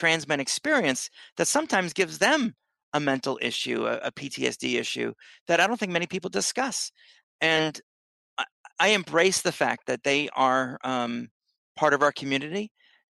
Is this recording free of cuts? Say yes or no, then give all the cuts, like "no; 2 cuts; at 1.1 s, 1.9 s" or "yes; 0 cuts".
yes; 0 cuts